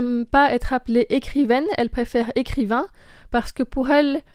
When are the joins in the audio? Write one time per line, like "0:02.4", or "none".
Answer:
none